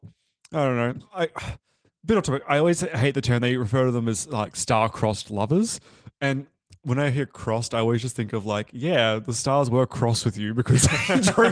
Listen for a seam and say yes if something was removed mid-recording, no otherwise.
no